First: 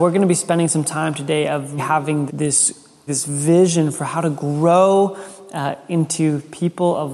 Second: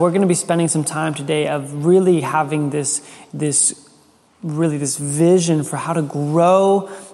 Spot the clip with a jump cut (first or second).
first